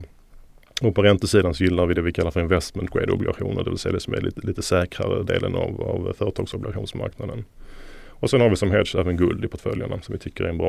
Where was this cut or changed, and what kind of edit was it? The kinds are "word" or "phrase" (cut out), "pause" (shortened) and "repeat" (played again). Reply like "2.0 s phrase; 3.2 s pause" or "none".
none